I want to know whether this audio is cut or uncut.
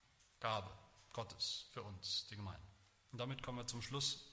uncut